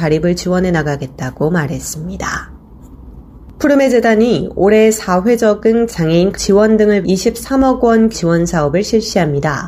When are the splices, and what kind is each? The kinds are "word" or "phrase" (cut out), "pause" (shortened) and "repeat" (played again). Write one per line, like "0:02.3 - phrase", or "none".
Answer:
0:05.9 - phrase
0:06.3 - word
0:07.0 - word
0:08.1 - word